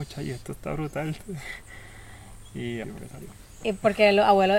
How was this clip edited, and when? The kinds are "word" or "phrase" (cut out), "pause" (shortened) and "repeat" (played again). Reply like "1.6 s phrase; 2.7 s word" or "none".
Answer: 2.8 s word